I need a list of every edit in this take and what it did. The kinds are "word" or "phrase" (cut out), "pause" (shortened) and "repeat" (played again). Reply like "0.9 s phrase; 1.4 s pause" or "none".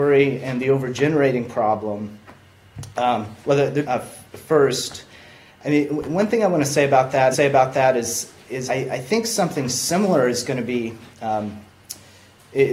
3.4 s pause; 3.8 s phrase; 7.3 s repeat; 8.7 s word

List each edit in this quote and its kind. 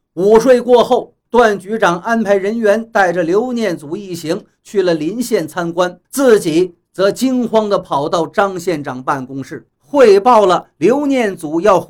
1.2 s pause; 6.0 s pause; 9.7 s pause

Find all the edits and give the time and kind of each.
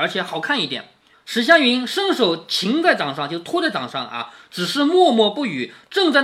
1.1 s pause

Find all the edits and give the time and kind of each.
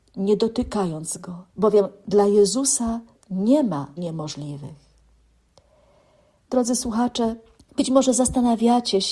1.5 s pause; 3.2 s pause; 4.0 s word; 7.6 s pause

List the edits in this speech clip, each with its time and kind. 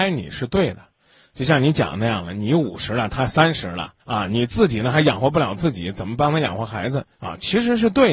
4.0 s pause; 7.1 s pause

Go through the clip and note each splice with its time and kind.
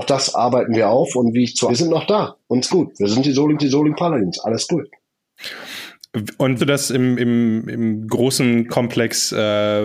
1.7 s phrase; 2.7 s word; 3.6 s repeat; 6.6 s phrase

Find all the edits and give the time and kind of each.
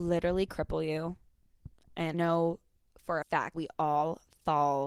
2.1 s word; 3.2 s word; 3.5 s word

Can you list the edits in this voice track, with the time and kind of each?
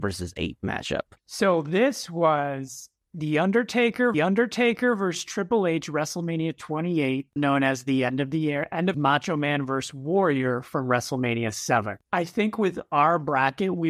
1.2 s pause; 4.1 s repeat; 7.4 s word; 8.9 s phrase

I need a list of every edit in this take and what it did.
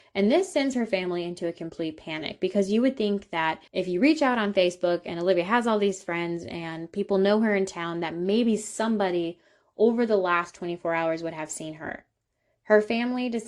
3.7 s pause

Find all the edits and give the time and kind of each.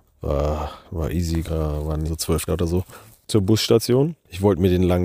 1.4 s word; 2.0 s word; 2.5 s word

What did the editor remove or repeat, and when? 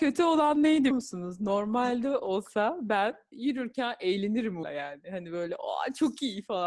0.9 s word; 3.3 s word; 4.6 s word

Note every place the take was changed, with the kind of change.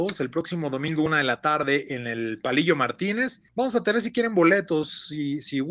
3.5 s pause

